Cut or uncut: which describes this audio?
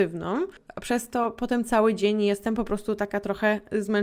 uncut